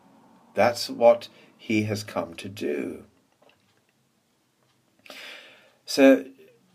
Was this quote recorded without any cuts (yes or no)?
yes